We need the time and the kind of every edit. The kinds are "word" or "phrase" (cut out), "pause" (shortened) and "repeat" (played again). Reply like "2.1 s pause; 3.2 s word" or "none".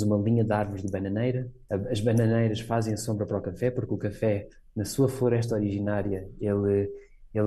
none